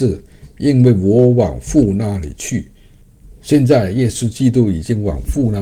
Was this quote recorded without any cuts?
yes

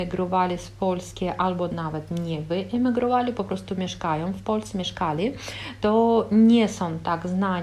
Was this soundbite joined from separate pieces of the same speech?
no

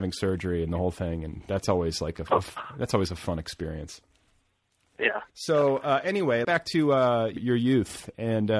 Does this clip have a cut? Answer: yes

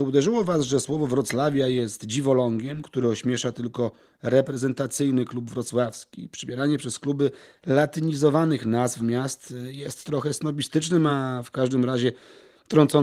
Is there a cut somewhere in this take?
no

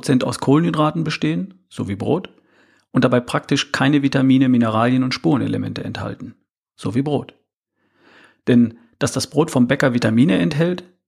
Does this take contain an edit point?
no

